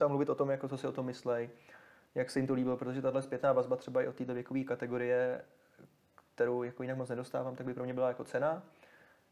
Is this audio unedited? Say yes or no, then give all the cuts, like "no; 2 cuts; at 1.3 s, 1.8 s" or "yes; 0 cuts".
yes; 0 cuts